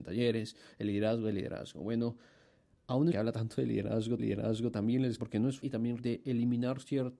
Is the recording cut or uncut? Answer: cut